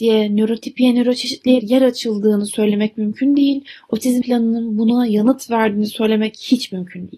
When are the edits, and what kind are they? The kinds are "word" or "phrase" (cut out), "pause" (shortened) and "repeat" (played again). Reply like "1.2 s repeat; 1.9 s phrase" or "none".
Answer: 1.6 s word; 4.2 s word

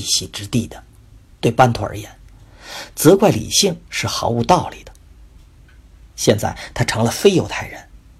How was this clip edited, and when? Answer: 1.0 s pause

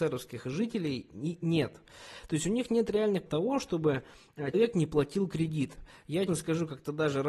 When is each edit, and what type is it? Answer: 3.3 s word; 4.5 s word; 6.3 s word

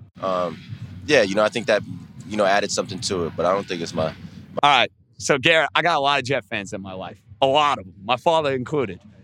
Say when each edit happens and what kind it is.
none

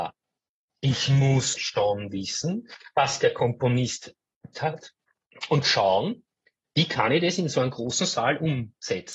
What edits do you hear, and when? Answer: 1.6 s word; 4.5 s word

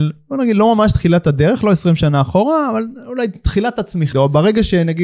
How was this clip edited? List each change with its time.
4.1 s word

